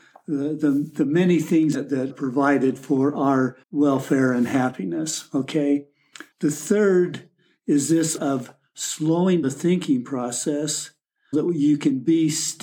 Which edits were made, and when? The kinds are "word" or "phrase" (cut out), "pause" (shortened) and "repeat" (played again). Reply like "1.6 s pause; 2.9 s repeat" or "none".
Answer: 1.7 s word; 2.1 s word; 3.6 s pause; 6.3 s pause; 8.2 s word; 9.4 s word; 11.3 s word

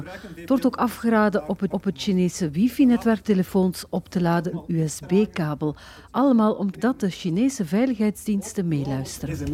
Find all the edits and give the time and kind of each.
1.7 s repeat; 3.2 s phrase; 4.5 s word; 6.7 s word

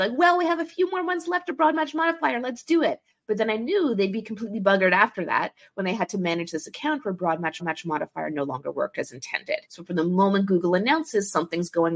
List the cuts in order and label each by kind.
7.6 s repeat; 9.7 s pause

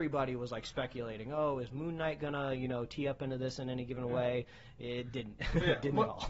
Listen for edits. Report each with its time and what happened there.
none

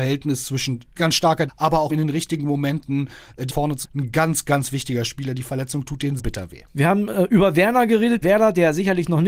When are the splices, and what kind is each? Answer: 1.0 s word; 1.5 s word; 1.9 s word; 3.5 s word; 3.8 s word; 6.2 s word; 8.2 s word

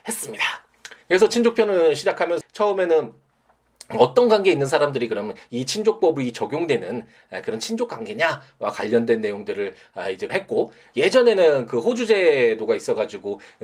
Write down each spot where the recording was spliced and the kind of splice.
1.0 s pause; 2.4 s word; 10.3 s word

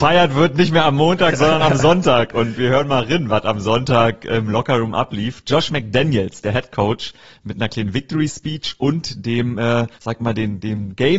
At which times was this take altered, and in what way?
2.6 s word; 9.9 s pause

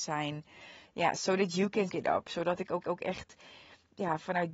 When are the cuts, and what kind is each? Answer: 1.9 s word; 2.8 s repeat

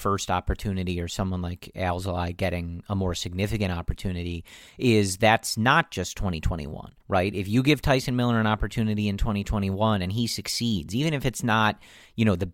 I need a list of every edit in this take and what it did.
7.0 s pause

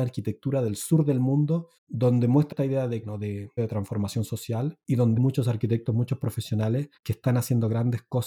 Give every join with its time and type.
1.8 s pause; 2.5 s word; 3.0 s word; 3.6 s phrase; 5.2 s word; 7.0 s pause

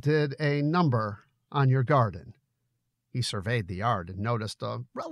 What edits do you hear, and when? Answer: none

